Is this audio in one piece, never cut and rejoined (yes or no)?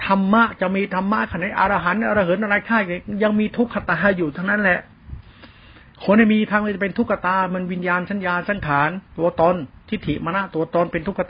no